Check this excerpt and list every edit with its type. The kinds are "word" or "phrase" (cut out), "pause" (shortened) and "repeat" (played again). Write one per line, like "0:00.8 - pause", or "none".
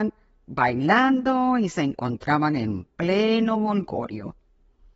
none